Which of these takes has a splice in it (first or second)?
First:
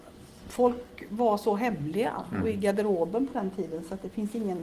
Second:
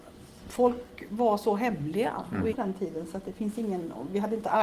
second